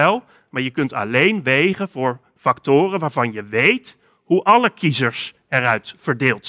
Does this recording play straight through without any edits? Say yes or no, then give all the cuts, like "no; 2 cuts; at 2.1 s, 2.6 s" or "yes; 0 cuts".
yes; 0 cuts